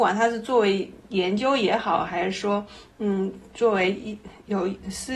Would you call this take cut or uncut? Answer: uncut